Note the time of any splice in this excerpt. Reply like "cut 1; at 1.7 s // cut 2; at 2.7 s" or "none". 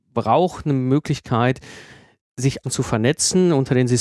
cut 1; at 2.6 s